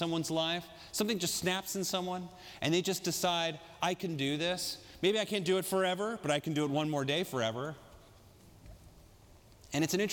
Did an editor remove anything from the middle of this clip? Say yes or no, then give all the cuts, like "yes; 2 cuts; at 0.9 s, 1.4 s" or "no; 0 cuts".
no; 0 cuts